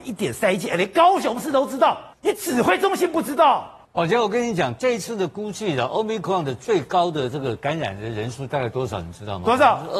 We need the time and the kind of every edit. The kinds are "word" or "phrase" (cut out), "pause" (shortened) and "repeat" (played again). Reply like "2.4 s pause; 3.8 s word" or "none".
2.1 s pause; 3.8 s pause